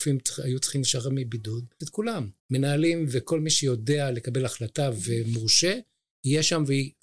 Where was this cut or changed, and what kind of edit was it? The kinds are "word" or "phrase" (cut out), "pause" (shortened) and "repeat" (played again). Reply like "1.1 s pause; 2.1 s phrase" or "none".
1.8 s word; 2.4 s pause